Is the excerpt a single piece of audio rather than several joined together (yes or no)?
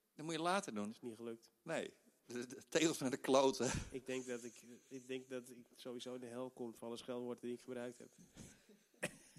yes